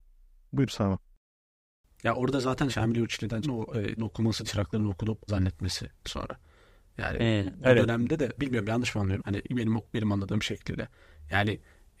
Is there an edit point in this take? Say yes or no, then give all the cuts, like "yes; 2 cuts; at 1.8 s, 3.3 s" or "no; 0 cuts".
yes; 8 cuts; at 2.7 s, 3.4 s, 4.0 s, 4.4 s, 5.3 s, 6.0 s, 8.4 s, 9.2 s